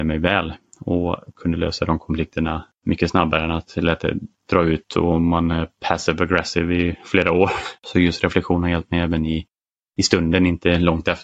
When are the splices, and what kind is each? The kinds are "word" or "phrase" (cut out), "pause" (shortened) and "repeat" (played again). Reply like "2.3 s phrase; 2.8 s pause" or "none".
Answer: 2.7 s pause; 7.8 s pause